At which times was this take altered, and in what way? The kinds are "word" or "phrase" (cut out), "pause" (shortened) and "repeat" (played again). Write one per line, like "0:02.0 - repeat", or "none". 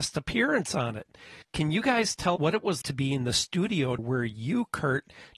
0:01.4 - pause
0:02.4 - word
0:02.8 - word
0:04.0 - word